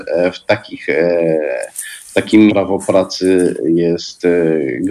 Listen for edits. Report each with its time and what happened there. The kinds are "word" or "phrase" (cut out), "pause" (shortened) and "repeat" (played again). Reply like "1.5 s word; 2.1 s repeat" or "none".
2.5 s word

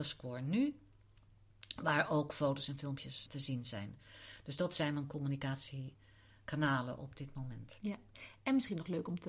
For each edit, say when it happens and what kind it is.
3.3 s word

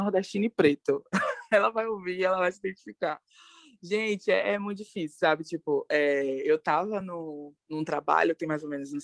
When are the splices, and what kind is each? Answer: none

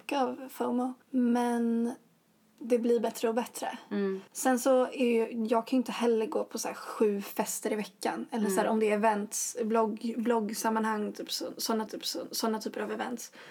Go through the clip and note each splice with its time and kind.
1.0 s pause; 4.3 s pause; 11.9 s repeat

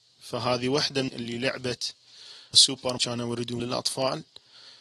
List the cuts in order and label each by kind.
1.1 s word; 2.5 s word; 3.0 s word; 3.6 s word

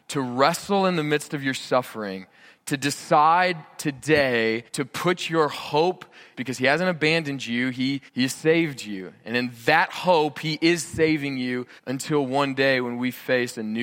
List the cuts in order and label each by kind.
4.7 s pause; 6.3 s phrase; 8.1 s pause; 11.8 s pause

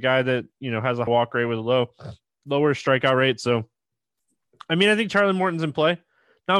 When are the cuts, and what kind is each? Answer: 1.1 s word

